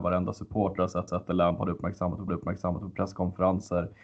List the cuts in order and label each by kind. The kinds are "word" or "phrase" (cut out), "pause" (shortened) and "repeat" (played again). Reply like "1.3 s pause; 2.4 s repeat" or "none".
1.1 s repeat; 2.3 s repeat